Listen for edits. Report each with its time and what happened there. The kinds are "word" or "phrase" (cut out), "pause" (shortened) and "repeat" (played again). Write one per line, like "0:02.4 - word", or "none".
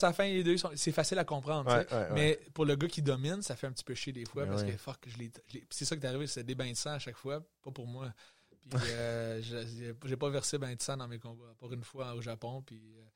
none